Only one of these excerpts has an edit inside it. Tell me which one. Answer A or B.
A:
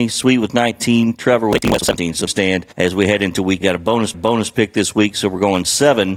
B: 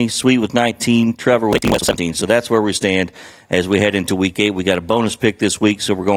A